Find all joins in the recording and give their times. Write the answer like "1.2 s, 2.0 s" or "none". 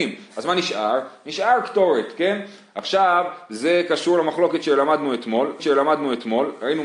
5.6 s